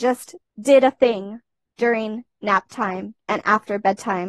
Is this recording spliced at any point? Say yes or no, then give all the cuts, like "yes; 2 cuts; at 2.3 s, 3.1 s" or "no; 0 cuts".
no; 0 cuts